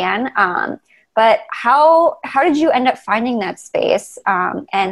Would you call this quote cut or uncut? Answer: uncut